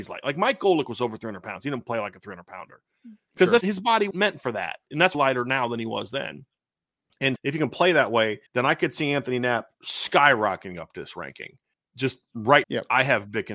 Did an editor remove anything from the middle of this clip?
yes; 8 cuts; at 3.6 s, 4.1 s, 5.1 s, 7.4 s, 8.5 s, 9.7 s, 11.7 s, 12.6 s

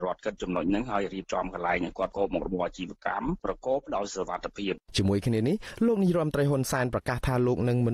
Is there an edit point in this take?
yes; 1 cut; at 4.8 s

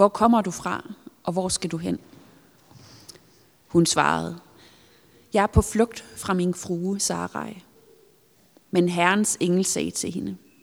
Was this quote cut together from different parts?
no; 0 cuts

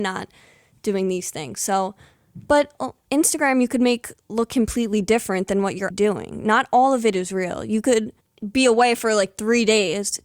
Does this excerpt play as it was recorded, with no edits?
no; 1 cut; at 5.9 s

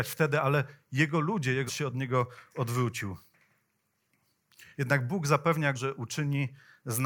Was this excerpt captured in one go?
no; 2 cuts; at 1.7 s, 5.7 s

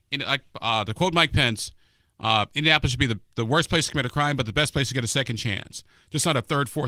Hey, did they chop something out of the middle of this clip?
no; 0 cuts

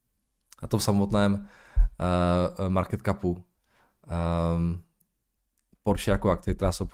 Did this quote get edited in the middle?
no; 0 cuts

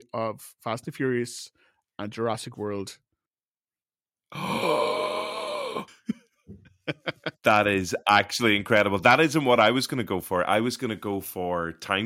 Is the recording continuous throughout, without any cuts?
yes; 0 cuts

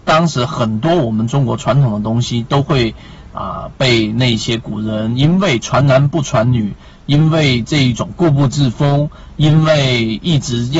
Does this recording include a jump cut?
no; 0 cuts

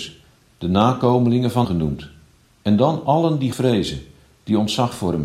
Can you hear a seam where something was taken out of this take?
yes; 3 cuts; at 1.6 s, 2.4 s, 3.5 s

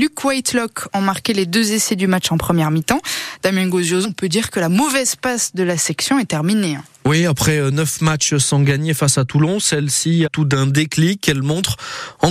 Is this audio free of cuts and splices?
no; 2 cuts; at 4.0 s, 10.3 s

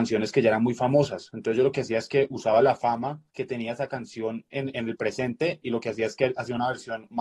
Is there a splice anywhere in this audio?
yes; 1 cut; at 3.3 s

